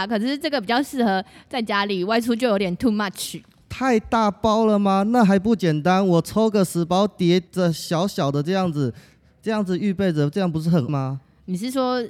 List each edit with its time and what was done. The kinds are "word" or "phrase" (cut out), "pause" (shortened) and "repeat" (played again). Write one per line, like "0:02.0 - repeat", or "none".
0:07.5 - pause
0:10.9 - word